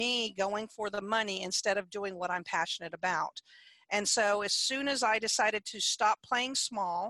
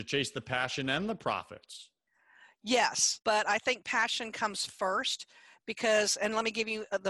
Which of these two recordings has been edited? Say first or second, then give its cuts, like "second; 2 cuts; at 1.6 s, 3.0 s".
second; 1 cut; at 3.2 s